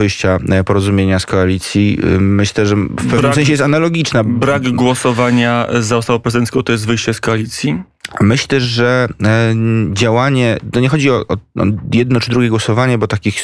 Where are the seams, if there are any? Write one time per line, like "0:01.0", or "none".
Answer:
none